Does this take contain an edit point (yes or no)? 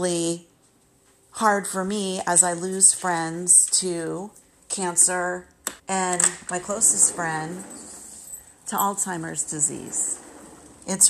yes